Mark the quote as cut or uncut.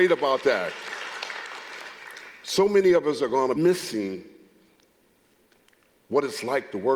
cut